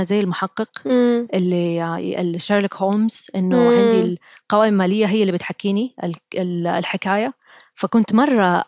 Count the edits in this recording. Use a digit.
0